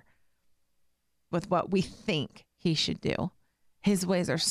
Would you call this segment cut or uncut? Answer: cut